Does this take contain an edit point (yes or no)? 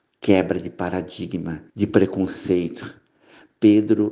yes